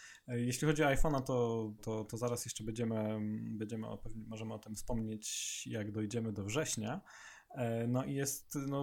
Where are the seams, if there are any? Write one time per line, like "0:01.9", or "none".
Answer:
0:01.8